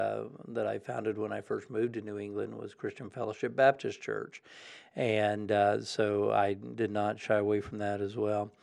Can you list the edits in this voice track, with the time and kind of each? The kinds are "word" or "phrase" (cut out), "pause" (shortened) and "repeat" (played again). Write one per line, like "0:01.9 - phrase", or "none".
none